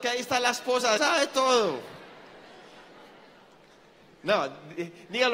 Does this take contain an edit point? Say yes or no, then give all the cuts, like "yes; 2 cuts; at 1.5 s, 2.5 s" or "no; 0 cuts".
yes; 1 cut; at 1.0 s